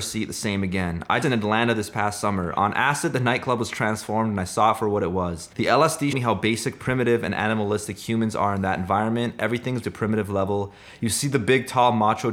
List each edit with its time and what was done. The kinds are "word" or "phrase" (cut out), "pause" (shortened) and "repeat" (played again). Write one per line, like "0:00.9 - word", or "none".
0:01.2 - phrase
0:05.5 - pause
0:06.1 - word
0:09.8 - word